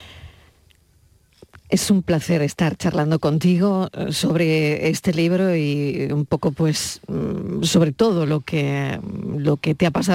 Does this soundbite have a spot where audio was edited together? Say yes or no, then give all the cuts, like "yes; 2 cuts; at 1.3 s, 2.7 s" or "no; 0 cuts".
no; 0 cuts